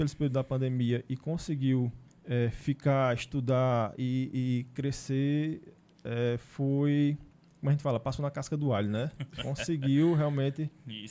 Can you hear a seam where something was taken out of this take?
no; 0 cuts

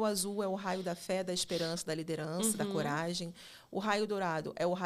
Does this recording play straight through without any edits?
yes; 0 cuts

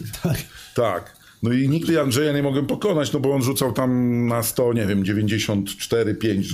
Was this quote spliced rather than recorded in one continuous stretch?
no; 0 cuts

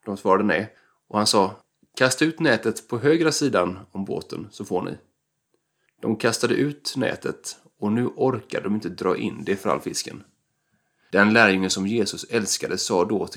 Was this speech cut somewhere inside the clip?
no; 0 cuts

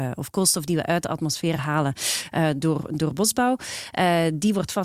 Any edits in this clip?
no; 0 cuts

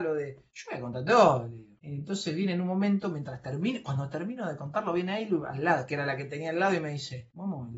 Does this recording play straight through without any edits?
yes; 0 cuts

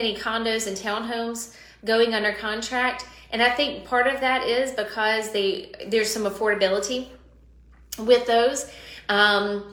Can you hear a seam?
no; 0 cuts

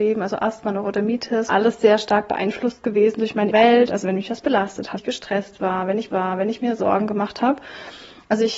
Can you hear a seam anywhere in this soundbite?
yes; 4 cuts; at 1.5 s, 3.5 s, 5.0 s, 6.1 s

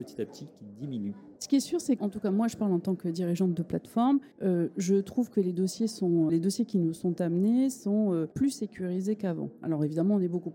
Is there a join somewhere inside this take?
yes; 5 cuts; at 1.4 s, 2.0 s, 4.3 s, 6.3 s, 8.3 s

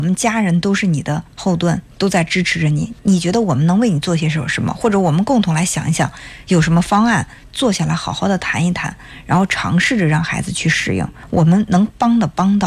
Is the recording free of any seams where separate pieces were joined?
no; 2 cuts; at 1.3 s, 1.9 s

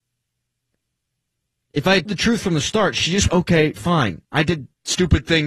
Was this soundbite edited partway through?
yes; 3 cuts; at 2.1 s, 3.3 s, 4.2 s

